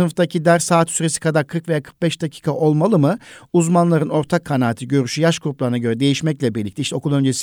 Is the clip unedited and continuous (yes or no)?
yes